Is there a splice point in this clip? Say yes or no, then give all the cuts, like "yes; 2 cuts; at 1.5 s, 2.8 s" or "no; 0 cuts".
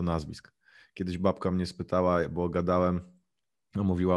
no; 0 cuts